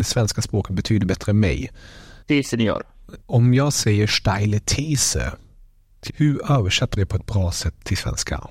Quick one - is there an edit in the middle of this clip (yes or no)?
yes